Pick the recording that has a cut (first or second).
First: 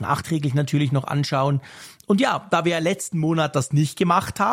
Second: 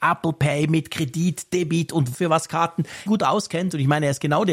second